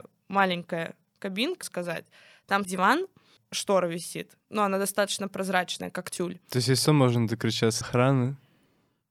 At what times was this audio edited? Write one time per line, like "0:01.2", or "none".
0:01.6
0:02.6
0:03.4
0:04.4
0:06.8
0:07.8